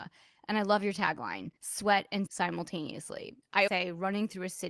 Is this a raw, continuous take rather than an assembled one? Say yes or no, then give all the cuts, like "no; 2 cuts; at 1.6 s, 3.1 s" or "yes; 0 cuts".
no; 3 cuts; at 1.6 s, 2.3 s, 3.7 s